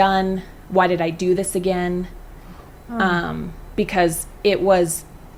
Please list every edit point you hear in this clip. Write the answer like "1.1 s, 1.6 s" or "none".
none